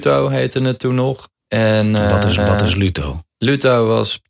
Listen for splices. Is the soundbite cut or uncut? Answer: cut